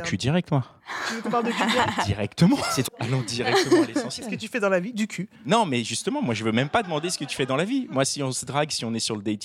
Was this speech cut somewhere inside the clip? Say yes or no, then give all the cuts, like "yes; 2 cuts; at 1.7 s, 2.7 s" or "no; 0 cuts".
yes; 1 cut; at 2.9 s